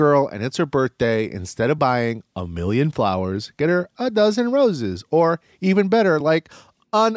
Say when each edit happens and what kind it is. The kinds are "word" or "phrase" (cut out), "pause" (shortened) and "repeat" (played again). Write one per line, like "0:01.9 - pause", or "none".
none